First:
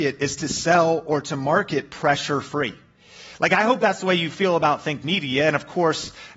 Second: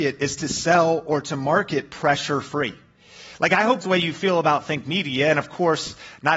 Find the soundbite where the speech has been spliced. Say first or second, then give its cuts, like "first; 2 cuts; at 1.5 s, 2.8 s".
second; 1 cut; at 3.8 s